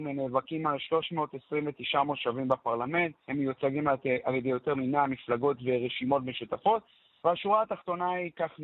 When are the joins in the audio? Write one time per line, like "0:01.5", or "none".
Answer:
0:03.2

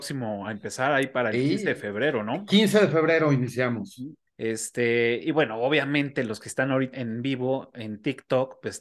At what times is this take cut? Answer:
0:04.3
0:06.9

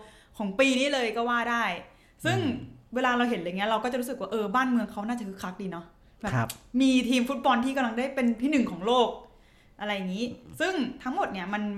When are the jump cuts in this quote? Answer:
none

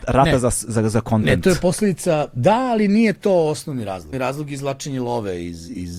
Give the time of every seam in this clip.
0:04.1

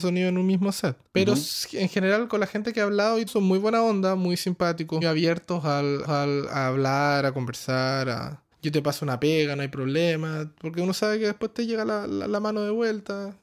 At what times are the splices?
0:01.1
0:03.3
0:05.0
0:06.0
0:08.5

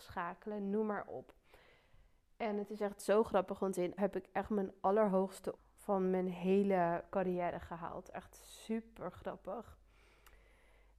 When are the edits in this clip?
0:04.0
0:05.6

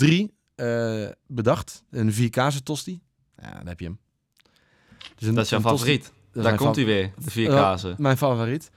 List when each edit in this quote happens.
none

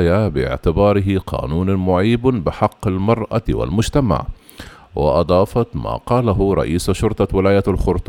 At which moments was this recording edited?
none

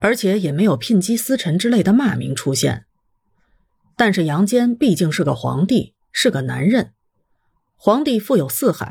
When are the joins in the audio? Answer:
none

